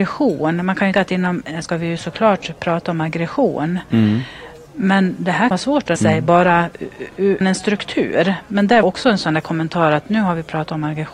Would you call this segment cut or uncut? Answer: cut